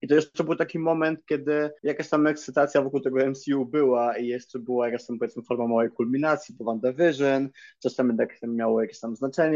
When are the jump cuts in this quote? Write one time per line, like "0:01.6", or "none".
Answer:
0:01.8